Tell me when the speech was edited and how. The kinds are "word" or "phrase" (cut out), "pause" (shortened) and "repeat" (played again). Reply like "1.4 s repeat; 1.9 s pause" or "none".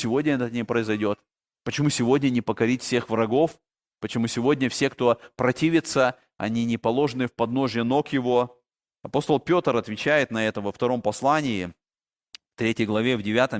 none